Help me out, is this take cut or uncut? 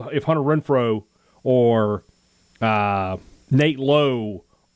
uncut